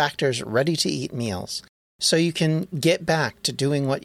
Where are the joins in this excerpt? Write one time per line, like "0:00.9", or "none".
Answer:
none